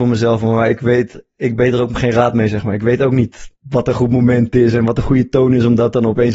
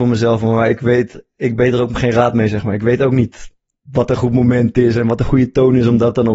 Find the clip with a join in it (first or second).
first